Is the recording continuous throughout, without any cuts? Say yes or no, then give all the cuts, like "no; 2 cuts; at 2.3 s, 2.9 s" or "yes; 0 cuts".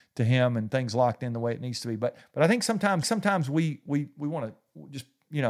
no; 1 cut; at 3.0 s